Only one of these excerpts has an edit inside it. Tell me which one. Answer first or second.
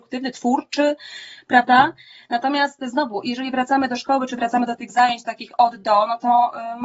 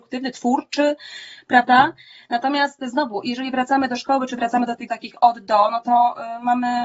second